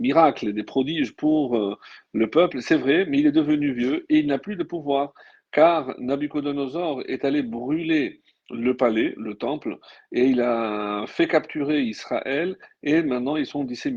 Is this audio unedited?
yes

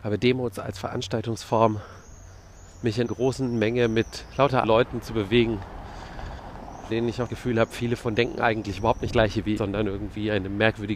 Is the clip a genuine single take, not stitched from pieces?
no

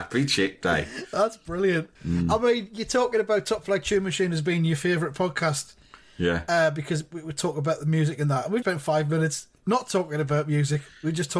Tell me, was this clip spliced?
yes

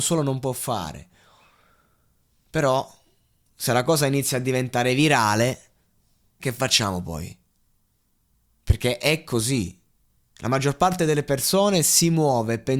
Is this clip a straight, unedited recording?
no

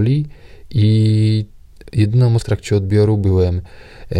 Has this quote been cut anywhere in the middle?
yes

